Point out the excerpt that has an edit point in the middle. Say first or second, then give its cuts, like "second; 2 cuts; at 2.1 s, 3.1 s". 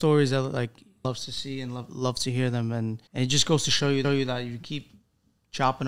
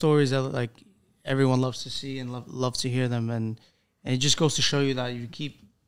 first; 3 cuts; at 1.0 s, 3.1 s, 4.0 s